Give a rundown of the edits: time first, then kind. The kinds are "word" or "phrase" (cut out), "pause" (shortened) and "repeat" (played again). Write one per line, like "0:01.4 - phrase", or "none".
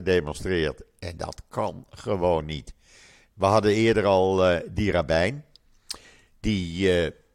none